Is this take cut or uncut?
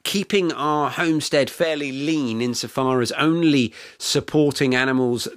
uncut